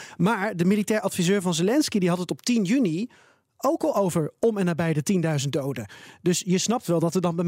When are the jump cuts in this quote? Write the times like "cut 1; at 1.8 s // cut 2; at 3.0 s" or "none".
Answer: none